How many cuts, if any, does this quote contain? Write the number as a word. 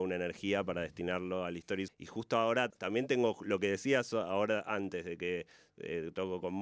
two